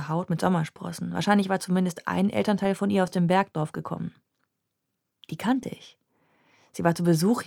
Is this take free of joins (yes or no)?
yes